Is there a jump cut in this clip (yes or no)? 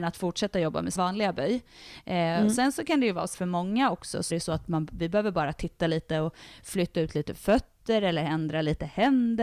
yes